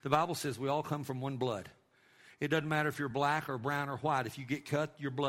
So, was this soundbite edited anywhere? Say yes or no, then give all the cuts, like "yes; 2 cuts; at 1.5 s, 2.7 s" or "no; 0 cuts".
no; 0 cuts